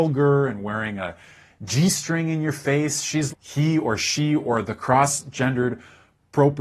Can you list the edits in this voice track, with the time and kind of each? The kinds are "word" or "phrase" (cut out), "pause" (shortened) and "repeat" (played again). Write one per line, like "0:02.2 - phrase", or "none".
0:03.3 - word